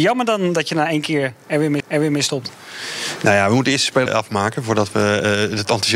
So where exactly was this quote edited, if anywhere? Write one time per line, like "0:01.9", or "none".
0:01.8
0:04.1